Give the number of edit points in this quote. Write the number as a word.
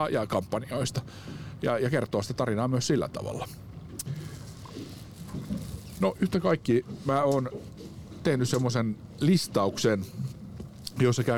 zero